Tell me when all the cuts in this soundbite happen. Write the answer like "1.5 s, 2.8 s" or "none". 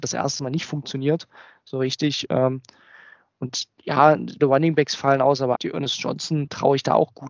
4.4 s, 5.5 s